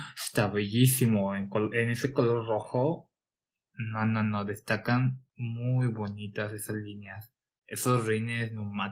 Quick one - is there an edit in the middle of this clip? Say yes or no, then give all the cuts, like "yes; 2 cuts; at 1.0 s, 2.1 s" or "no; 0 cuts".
yes; 1 cut; at 5.3 s